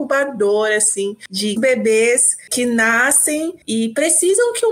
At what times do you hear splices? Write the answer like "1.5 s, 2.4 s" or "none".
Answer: 1.6 s, 2.5 s, 3.6 s